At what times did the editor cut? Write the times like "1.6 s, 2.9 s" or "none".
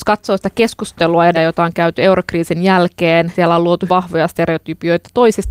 1.3 s, 3.3 s, 3.9 s